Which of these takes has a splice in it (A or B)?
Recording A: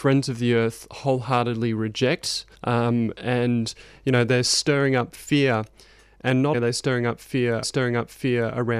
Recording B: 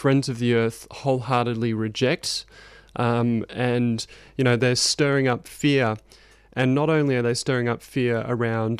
A